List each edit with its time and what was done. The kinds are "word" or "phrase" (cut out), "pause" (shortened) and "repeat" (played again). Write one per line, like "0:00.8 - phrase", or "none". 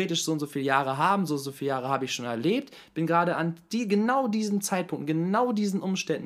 none